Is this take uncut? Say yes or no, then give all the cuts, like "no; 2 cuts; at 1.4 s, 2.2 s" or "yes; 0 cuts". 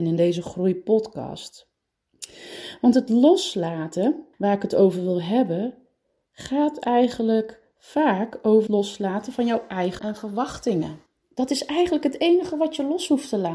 no; 4 cuts; at 4.3 s, 8.7 s, 10.0 s, 11.1 s